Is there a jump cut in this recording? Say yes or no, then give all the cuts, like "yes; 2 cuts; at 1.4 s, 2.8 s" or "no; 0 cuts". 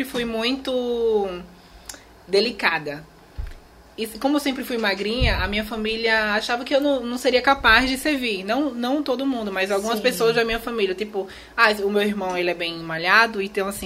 no; 0 cuts